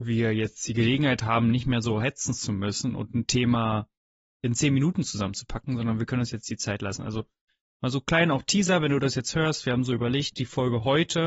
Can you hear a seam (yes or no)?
no